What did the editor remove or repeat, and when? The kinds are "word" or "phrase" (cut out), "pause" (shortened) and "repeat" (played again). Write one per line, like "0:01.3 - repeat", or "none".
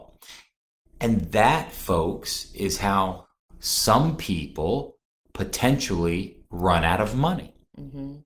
0:06.5 - pause